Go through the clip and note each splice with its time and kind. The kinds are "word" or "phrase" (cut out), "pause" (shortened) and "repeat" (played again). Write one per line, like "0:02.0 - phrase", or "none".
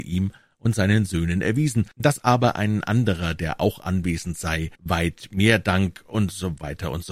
0:01.9 - pause
0:04.8 - pause